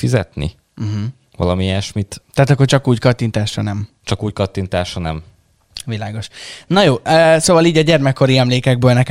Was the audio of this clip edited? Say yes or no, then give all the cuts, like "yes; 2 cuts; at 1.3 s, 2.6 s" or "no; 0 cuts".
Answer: no; 0 cuts